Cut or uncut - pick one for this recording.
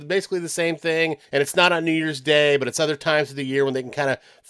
cut